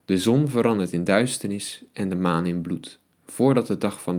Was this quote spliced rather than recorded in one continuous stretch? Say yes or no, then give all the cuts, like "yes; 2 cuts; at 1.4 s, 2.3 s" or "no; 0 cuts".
no; 0 cuts